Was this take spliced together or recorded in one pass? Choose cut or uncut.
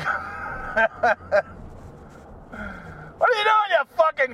uncut